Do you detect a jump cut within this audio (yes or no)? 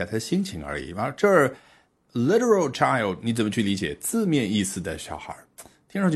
no